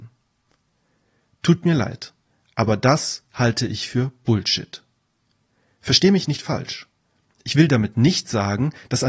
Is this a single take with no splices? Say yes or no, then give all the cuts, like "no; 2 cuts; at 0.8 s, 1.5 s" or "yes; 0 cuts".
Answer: yes; 0 cuts